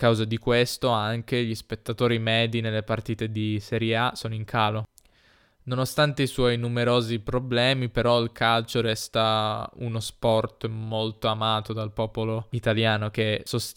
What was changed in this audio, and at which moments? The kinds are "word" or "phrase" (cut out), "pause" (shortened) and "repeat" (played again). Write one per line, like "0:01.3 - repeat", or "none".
none